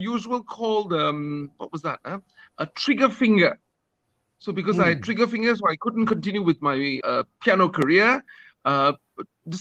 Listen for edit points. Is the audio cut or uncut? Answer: cut